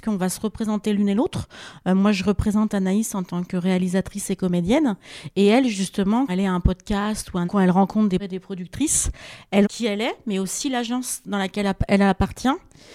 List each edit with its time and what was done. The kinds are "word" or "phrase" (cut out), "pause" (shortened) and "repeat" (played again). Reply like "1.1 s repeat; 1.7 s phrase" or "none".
6.3 s word; 7.5 s phrase; 8.2 s word; 9.6 s word